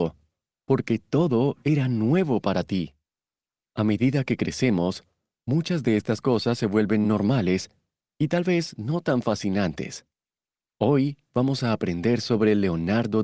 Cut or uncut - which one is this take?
uncut